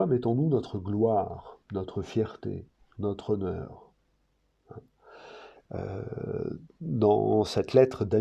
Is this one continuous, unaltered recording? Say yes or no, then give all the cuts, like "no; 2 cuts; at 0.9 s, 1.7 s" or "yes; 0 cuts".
no; 2 cuts; at 1.6 s, 2.7 s